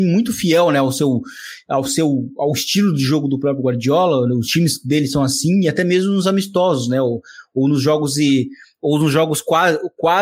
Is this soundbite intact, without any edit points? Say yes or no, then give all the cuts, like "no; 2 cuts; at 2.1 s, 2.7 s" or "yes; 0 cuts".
yes; 0 cuts